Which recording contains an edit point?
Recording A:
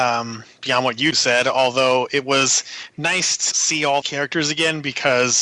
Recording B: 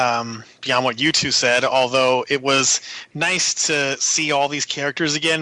A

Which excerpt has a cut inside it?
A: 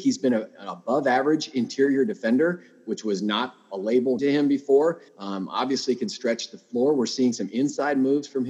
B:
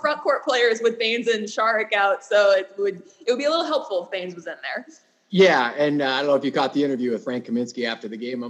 A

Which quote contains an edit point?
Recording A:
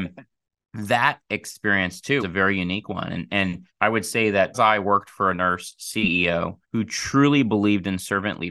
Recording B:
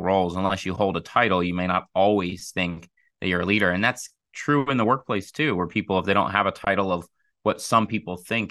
A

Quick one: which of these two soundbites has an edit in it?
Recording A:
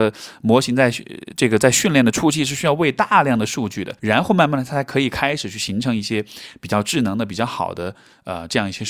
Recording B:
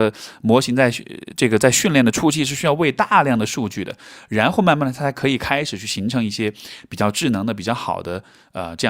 A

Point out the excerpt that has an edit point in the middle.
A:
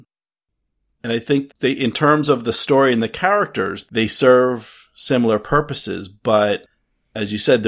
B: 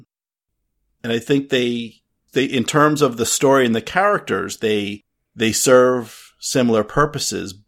A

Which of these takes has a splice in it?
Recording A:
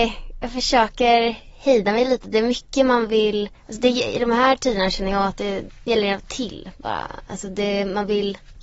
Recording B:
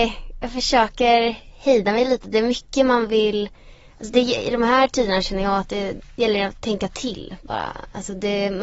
A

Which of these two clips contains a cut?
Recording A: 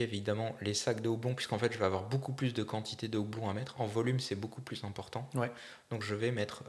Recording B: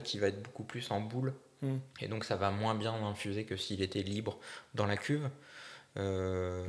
B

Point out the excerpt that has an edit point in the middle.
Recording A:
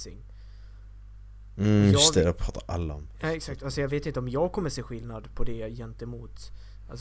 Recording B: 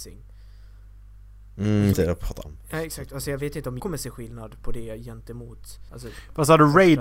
B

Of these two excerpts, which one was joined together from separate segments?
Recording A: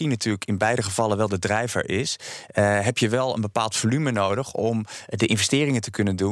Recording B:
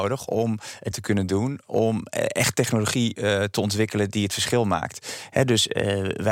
B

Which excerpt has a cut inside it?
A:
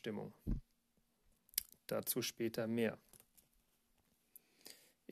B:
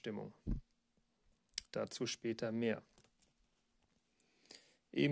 B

